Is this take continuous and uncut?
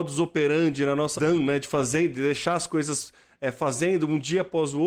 no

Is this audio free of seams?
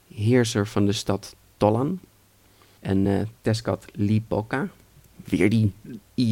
yes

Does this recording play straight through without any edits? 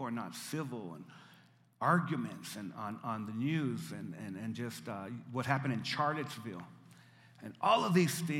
yes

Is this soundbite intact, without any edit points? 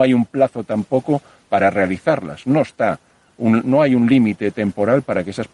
yes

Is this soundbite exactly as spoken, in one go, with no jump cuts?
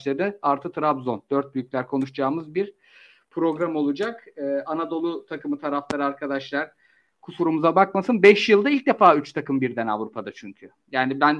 yes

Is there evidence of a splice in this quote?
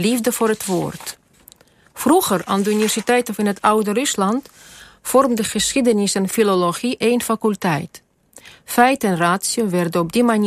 no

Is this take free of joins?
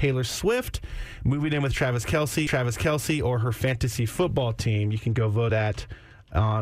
no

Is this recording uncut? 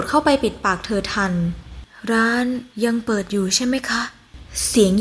no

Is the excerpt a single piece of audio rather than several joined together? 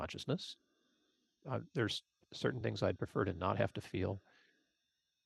yes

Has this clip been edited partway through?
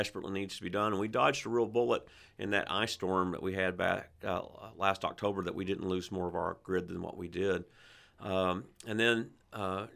no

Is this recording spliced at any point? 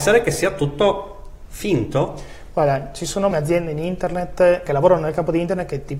yes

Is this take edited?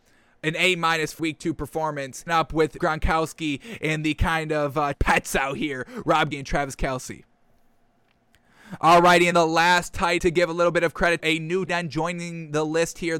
yes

